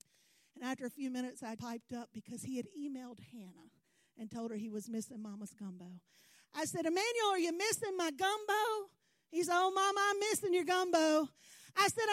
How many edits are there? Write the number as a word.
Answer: one